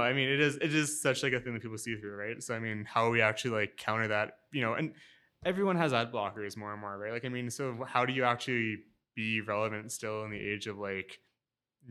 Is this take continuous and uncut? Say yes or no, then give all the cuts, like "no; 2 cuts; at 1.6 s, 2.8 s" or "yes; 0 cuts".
yes; 0 cuts